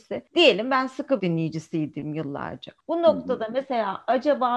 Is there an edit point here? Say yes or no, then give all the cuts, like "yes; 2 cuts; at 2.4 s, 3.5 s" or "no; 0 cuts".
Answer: yes; 1 cut; at 1.2 s